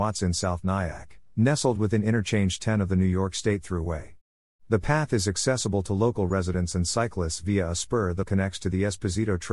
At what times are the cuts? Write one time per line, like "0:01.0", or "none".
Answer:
0:08.2